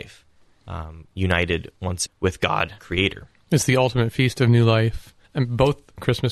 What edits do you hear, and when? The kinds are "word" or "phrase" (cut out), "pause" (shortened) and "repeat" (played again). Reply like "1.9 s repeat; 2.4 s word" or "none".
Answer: 2.0 s word; 2.8 s word; 5.2 s pause